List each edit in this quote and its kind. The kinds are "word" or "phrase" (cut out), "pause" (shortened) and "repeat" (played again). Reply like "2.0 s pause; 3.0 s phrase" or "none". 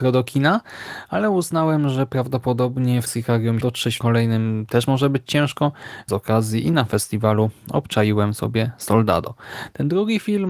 3.1 s phrase; 3.6 s phrase; 4.0 s word; 6.1 s phrase